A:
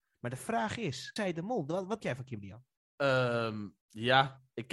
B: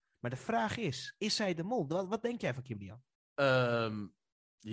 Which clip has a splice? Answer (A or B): A